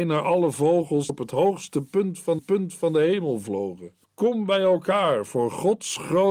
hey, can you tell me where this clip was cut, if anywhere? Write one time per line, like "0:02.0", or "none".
0:01.1
0:02.4
0:04.0